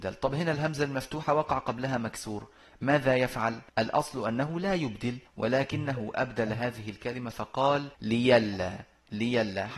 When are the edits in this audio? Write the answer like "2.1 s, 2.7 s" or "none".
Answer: 3.7 s, 5.3 s, 7.9 s